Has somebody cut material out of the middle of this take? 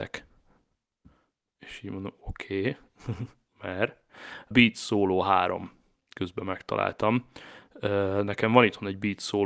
yes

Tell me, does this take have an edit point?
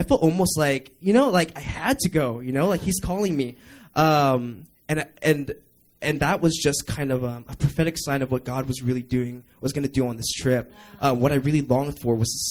no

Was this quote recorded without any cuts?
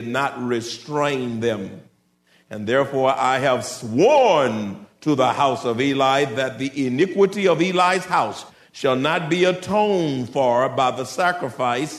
yes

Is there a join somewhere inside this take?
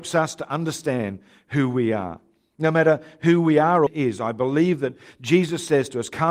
yes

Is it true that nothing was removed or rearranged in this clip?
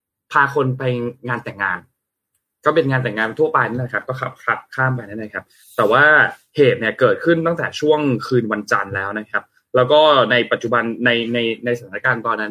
yes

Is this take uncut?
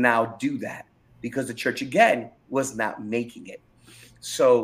yes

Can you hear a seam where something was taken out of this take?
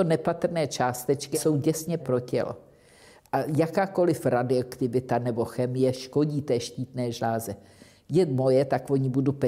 yes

